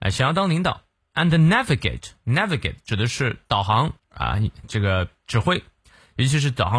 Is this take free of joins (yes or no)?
no